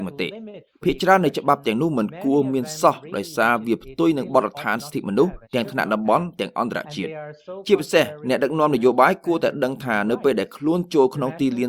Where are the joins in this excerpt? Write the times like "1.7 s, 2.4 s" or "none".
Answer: 5.4 s